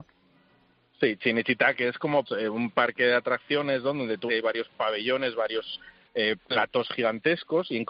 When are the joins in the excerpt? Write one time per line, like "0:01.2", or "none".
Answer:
0:02.3
0:04.3